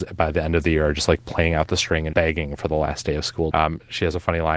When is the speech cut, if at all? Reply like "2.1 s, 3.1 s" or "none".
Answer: 2.1 s, 3.5 s